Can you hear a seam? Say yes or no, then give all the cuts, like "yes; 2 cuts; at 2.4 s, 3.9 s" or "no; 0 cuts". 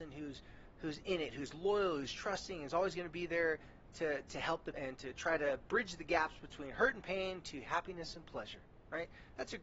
yes; 1 cut; at 4.7 s